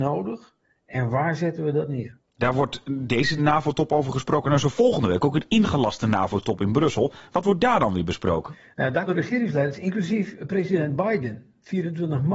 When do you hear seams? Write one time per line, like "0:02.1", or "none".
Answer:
0:03.4
0:09.1